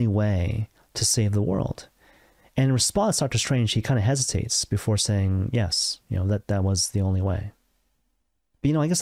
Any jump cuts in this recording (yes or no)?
no